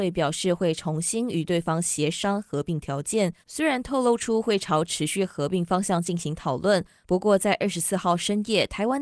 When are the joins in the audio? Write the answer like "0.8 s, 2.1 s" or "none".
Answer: 3.4 s

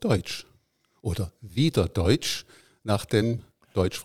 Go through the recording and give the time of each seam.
none

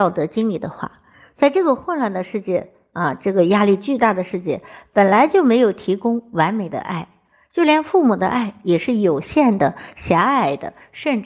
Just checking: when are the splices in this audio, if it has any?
none

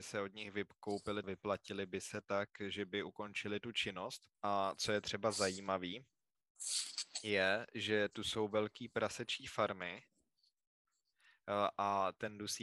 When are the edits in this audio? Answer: 1.2 s, 4.3 s

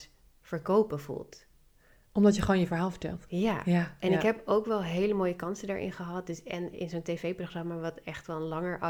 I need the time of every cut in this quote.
none

